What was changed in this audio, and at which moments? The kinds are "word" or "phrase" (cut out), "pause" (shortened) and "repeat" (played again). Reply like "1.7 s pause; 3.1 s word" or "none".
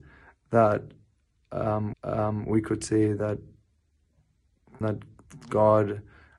1.9 s repeat; 4.8 s phrase